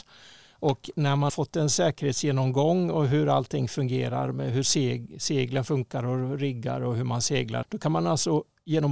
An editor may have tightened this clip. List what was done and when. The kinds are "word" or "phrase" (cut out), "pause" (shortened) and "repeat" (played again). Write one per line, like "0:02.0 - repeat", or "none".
0:01.3 - word
0:07.6 - word